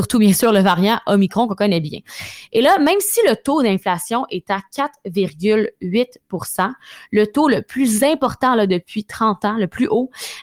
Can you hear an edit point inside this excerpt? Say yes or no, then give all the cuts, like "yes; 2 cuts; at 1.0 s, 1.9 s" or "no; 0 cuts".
no; 0 cuts